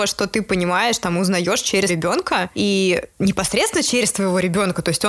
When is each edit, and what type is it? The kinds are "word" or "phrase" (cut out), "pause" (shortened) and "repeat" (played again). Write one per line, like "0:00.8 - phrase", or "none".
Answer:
0:01.9 - word